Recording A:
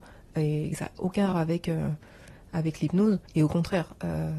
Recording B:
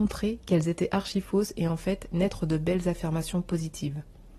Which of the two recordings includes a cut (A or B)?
A